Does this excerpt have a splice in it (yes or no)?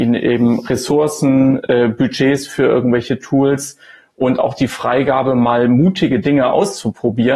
no